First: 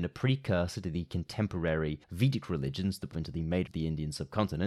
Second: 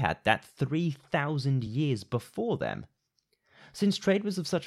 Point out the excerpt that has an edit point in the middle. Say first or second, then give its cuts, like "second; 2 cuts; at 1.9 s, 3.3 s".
first; 3 cuts; at 2.0 s, 3.1 s, 3.7 s